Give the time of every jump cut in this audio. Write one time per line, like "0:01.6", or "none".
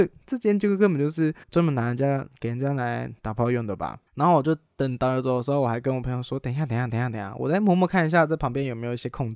0:01.4
0:03.2
0:04.1
0:06.9